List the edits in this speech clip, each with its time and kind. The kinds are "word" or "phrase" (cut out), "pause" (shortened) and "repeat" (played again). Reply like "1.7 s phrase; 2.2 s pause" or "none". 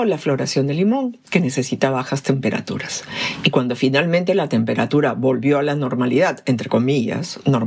none

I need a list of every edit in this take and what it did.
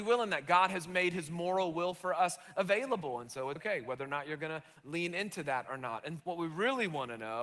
3.6 s word; 6.2 s word

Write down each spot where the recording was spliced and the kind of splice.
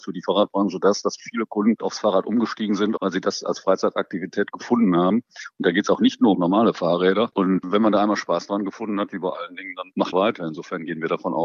1.2 s word; 6.3 s phrase; 10.1 s phrase

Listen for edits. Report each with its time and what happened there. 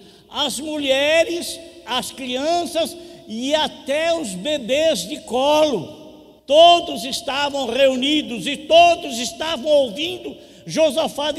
6.4 s pause

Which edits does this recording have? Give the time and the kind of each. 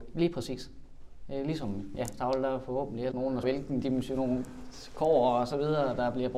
2.1 s word; 3.1 s word; 3.4 s word

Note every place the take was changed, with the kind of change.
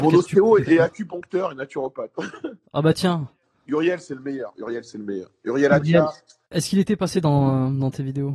none

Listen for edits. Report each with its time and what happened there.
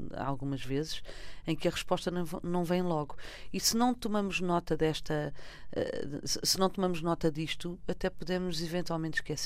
none

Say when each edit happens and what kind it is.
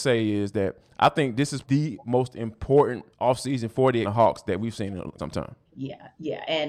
1.6 s word; 3.1 s pause; 4.0 s word; 5.2 s word; 5.7 s pause

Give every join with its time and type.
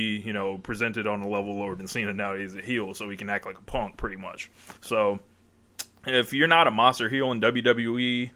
4.8 s pause

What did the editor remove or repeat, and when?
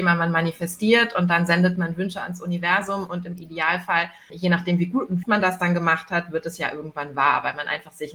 4.3 s word; 5.2 s phrase

